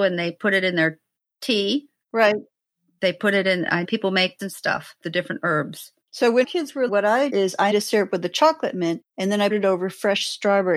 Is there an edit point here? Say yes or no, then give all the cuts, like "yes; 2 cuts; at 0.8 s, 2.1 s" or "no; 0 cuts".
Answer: yes; 8 cuts; at 3.8 s, 4.4 s, 5.0 s, 6.4 s, 6.9 s, 7.3 s, 7.7 s, 9.5 s